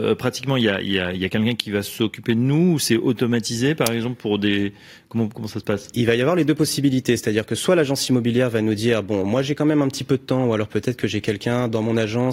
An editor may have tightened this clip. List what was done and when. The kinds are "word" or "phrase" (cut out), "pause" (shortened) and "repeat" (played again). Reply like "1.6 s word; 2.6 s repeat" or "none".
none